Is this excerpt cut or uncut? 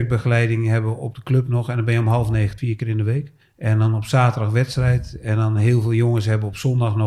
cut